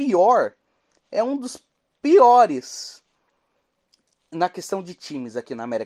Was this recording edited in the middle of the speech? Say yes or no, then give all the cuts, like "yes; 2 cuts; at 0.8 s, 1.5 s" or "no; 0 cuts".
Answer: no; 0 cuts